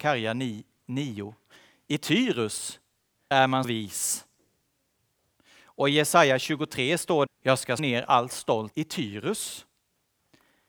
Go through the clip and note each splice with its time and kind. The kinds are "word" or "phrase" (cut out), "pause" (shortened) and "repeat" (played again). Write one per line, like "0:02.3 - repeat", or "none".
0:03.3 - word
0:03.6 - word
0:07.3 - word
0:07.8 - word
0:08.7 - word